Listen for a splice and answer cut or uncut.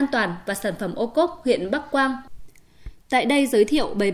uncut